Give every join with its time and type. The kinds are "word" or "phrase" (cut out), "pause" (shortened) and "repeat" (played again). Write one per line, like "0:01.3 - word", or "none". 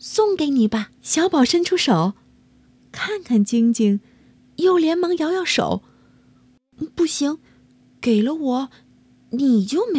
0:01.0 - pause